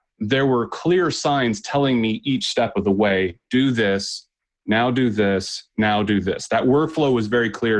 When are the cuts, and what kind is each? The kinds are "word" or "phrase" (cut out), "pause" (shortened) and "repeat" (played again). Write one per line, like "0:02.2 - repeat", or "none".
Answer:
none